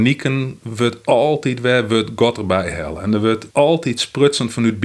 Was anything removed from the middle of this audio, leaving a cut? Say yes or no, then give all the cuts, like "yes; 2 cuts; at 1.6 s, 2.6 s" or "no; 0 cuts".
yes; 1 cut; at 3.5 s